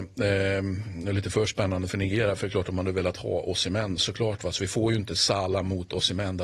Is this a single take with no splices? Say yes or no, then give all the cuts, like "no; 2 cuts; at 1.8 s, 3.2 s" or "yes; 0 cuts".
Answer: yes; 0 cuts